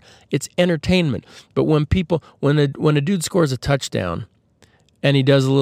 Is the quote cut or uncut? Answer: uncut